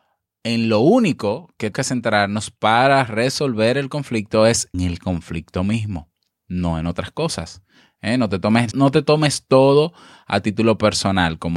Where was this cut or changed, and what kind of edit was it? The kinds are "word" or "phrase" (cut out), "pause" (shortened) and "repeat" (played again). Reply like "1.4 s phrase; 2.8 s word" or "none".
1.7 s word; 4.7 s word; 8.7 s word